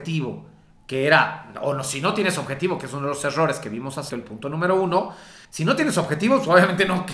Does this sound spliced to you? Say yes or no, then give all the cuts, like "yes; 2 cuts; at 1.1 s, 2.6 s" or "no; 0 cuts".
yes; 2 cuts; at 4.1 s, 5.4 s